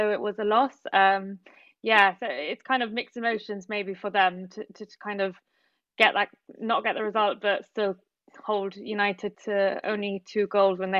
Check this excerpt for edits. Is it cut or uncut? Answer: cut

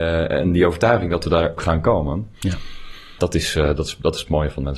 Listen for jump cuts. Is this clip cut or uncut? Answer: cut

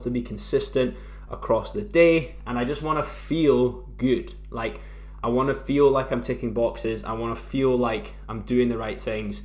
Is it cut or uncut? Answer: uncut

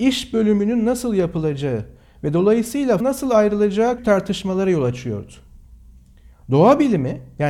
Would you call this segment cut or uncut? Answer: cut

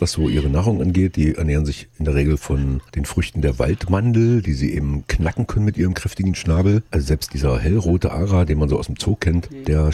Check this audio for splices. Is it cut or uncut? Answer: uncut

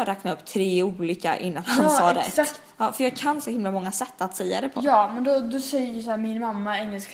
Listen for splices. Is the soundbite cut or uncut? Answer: uncut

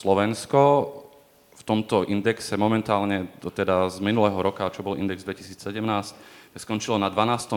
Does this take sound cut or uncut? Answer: uncut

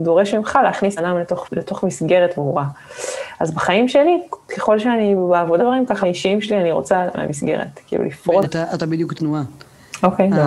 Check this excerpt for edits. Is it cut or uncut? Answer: cut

